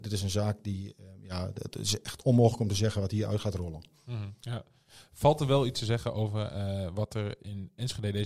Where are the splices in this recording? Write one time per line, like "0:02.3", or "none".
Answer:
none